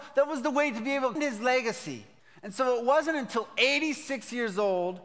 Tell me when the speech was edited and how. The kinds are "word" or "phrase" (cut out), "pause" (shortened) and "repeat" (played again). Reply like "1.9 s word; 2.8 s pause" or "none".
1.2 s word; 2.2 s pause